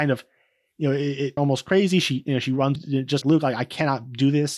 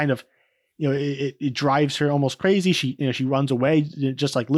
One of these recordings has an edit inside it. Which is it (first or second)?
first